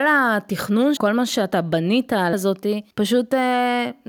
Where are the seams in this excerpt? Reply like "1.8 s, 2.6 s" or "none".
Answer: 1.0 s, 2.3 s, 2.9 s